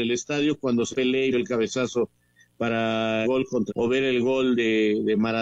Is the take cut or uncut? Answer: cut